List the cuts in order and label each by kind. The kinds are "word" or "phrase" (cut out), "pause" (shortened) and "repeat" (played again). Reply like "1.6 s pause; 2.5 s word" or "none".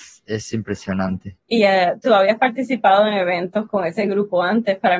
1.4 s pause